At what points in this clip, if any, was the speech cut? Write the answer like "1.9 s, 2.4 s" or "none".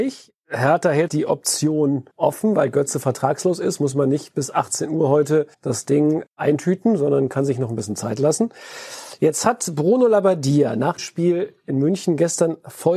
1.1 s, 2.1 s, 5.5 s, 11.0 s